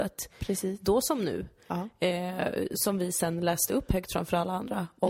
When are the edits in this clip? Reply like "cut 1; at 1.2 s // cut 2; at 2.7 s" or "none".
none

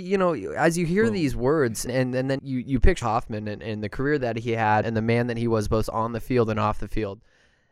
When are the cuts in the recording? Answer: cut 1; at 1.9 s // cut 2; at 2.4 s // cut 3; at 3.0 s // cut 4; at 4.8 s

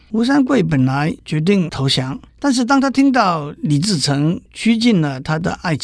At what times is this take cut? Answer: cut 1; at 1.2 s // cut 2; at 2.3 s

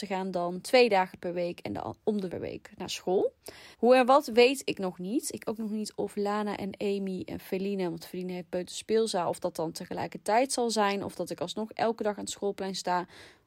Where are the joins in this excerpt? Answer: cut 1; at 2.3 s // cut 2; at 3.7 s // cut 3; at 5.4 s

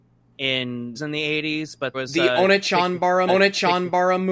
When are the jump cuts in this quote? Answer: cut 1; at 0.9 s // cut 2; at 1.9 s // cut 3; at 3.3 s

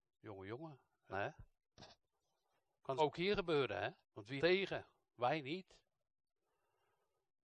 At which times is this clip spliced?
cut 1; at 1.1 s // cut 2; at 3.0 s // cut 3; at 4.0 s // cut 4; at 4.4 s

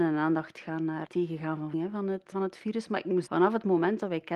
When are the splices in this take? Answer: cut 1; at 1.1 s // cut 2; at 1.7 s // cut 3; at 2.3 s // cut 4; at 3.3 s

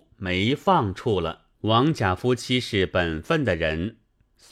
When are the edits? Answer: cut 1; at 1.5 s

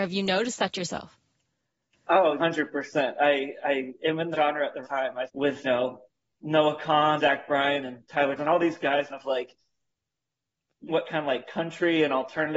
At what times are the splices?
cut 1; at 2.4 s // cut 2; at 4.3 s // cut 3; at 4.8 s // cut 4; at 5.3 s // cut 5; at 5.6 s // cut 6; at 7.2 s // cut 7; at 8.4 s // cut 8; at 9.1 s // cut 9; at 10.9 s

